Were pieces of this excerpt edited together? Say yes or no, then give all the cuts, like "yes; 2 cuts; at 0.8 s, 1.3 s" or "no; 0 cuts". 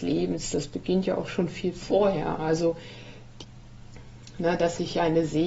no; 0 cuts